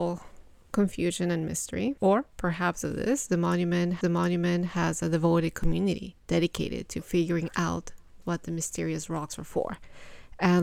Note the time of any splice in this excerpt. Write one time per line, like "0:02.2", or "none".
0:02.0
0:02.8
0:04.0
0:06.2
0:08.2